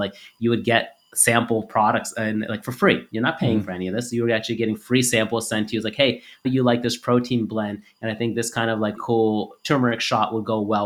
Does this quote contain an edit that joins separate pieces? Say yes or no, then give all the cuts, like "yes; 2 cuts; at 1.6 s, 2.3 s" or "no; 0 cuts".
yes; 2 cuts; at 6.4 s, 9.0 s